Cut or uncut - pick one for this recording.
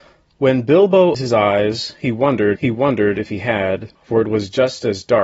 cut